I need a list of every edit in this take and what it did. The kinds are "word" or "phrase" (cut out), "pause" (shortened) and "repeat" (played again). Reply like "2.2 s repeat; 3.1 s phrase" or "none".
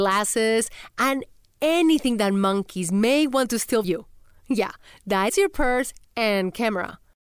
3.8 s word; 5.3 s word